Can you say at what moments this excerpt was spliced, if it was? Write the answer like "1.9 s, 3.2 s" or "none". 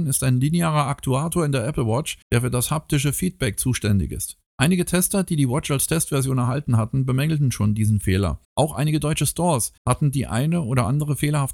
2.2 s, 4.5 s, 8.4 s, 9.8 s